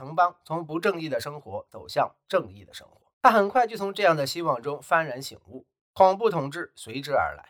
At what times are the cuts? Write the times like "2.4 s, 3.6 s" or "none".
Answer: 3.1 s